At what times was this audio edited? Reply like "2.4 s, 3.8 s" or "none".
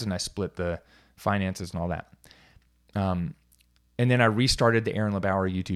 none